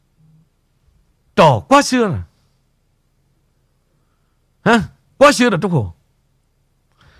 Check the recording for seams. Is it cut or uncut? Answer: uncut